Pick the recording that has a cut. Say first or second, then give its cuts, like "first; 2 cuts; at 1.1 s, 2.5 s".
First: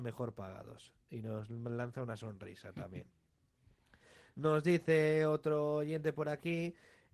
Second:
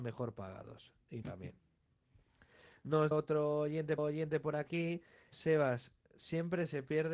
second; 4 cuts; at 1.2 s, 3.1 s, 4.0 s, 5.3 s